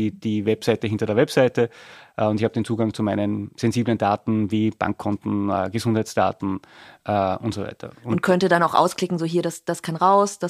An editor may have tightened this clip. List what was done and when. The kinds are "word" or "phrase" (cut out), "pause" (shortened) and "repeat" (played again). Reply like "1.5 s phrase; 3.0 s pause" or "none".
none